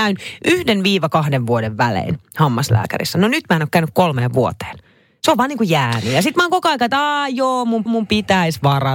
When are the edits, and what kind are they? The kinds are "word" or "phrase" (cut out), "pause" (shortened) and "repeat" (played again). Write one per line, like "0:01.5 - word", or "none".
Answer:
0:07.9 - repeat